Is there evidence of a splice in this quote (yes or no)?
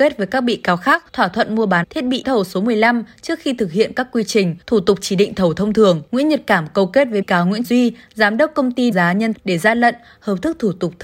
yes